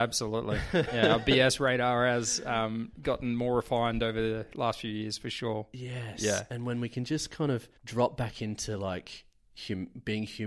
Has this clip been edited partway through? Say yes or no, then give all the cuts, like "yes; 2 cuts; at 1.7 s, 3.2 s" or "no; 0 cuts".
yes; 1 cut; at 7.8 s